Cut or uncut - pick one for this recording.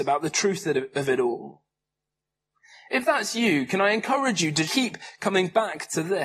cut